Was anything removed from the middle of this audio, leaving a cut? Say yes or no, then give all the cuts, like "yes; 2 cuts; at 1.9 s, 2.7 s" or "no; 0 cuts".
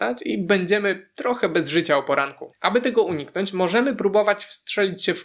no; 0 cuts